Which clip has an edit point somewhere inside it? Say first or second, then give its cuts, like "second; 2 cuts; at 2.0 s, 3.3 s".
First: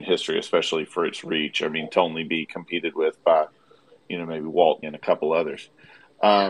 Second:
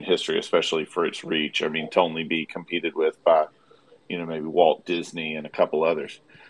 first; 1 cut; at 4.8 s